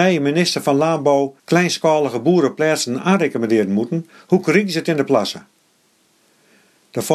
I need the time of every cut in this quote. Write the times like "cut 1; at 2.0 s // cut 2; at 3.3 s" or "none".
cut 1; at 1.4 s